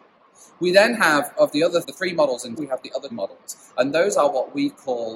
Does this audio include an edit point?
yes; 3 cuts; at 1.8 s, 2.6 s, 3.1 s

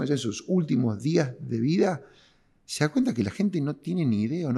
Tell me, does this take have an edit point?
no; 0 cuts

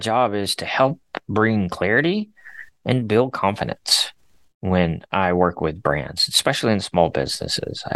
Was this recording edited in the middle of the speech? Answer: no; 0 cuts

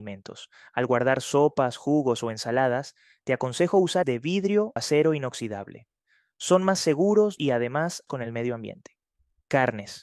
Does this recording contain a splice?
yes; 4 cuts; at 4.0 s, 4.8 s, 7.4 s, 8.1 s

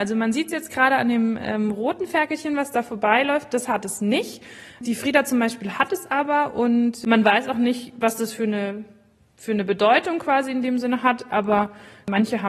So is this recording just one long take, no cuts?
yes; 0 cuts

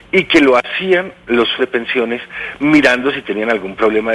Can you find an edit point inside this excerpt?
yes; 1 cut; at 1.6 s

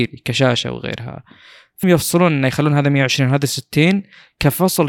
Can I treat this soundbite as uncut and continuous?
no; 1 cut; at 1.8 s

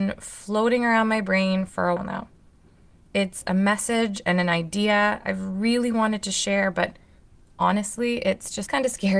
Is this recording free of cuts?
no; 1 cut; at 2.0 s

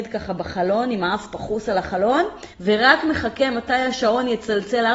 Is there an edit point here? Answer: yes; 1 cut; at 2.5 s

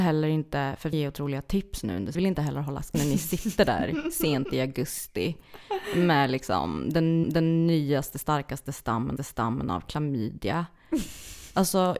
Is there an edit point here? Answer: yes; 5 cuts; at 0.9 s, 2.1 s, 2.9 s, 7.2 s, 9.2 s

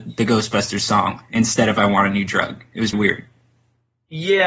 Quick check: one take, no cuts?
no; 1 cut; at 2.9 s

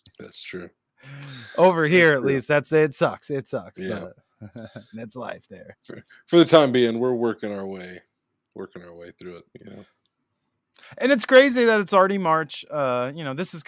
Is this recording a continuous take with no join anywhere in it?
no; 1 cut; at 9.5 s

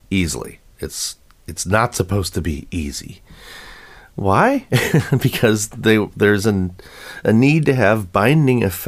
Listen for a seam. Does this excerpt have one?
no; 0 cuts

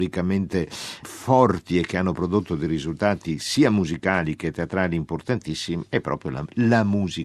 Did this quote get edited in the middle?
yes; 1 cut; at 1.0 s

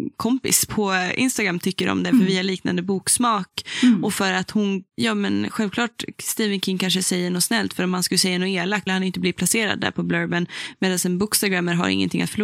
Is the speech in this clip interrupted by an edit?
yes; 2 cuts; at 4.9 s, 8.9 s

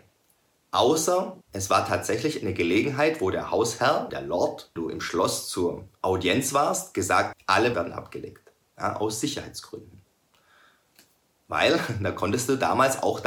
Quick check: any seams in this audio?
yes; 6 cuts; at 1.4 s, 4.1 s, 4.8 s, 5.9 s, 7.3 s, 7.7 s

